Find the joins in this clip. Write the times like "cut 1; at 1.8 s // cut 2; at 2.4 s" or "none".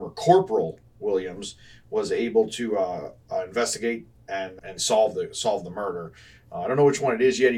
none